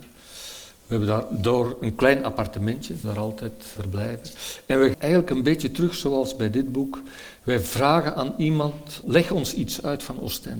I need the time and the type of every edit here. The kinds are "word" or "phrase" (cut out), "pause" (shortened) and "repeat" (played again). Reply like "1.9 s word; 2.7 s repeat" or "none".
3.0 s word; 3.8 s word; 4.9 s word; 9.0 s word